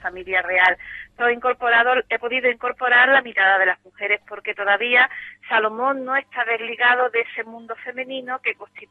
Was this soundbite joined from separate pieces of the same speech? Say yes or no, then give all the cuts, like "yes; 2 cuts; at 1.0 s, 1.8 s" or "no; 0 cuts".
yes; 1 cut; at 1.2 s